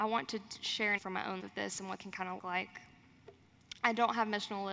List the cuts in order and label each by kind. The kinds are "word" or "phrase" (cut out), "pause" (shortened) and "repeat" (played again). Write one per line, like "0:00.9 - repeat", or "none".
0:01.0 - word
0:01.4 - word
0:02.0 - word
0:02.4 - word